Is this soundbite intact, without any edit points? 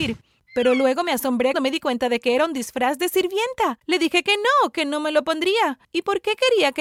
no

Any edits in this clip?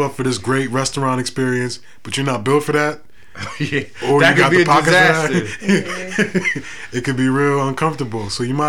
no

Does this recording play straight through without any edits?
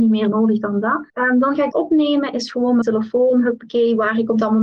no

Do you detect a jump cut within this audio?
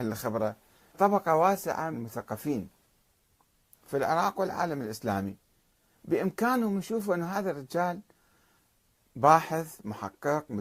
yes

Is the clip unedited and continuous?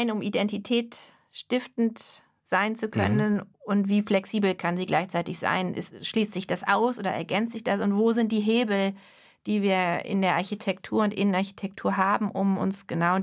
no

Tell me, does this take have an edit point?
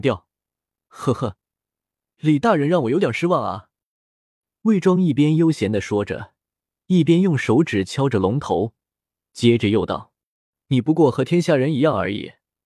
no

